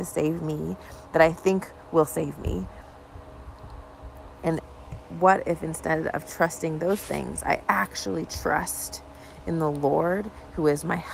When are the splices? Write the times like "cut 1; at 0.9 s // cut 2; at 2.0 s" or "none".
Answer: none